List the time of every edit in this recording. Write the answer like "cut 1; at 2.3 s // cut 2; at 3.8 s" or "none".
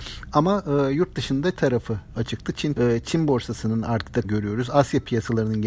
cut 1; at 1.5 s // cut 2; at 2.7 s // cut 3; at 4.2 s